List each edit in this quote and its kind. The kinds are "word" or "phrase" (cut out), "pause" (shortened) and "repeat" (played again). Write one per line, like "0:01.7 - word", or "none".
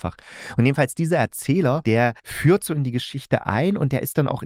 0:02.2 - pause